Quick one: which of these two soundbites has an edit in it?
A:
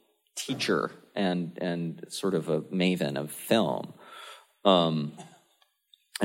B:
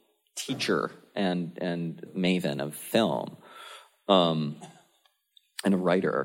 B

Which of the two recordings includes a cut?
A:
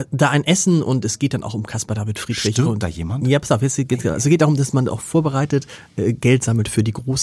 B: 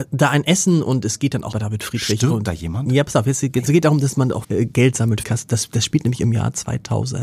B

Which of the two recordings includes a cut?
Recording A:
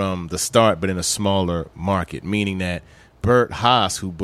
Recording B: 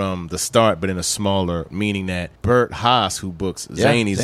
B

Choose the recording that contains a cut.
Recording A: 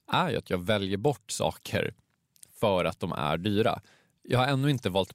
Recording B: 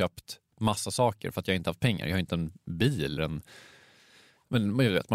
B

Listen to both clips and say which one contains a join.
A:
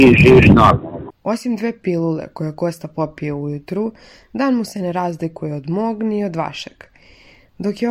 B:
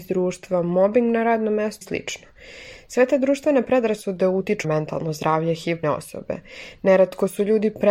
B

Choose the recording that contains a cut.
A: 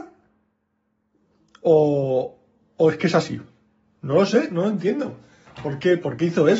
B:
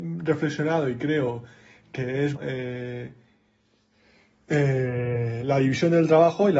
B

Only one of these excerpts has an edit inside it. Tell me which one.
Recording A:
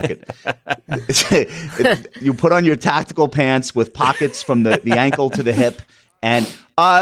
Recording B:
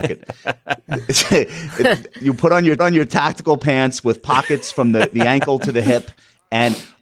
B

